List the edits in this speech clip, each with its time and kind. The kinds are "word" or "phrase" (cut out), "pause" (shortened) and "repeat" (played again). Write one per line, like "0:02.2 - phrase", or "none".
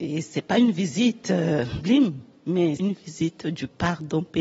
0:01.8 - word
0:02.8 - word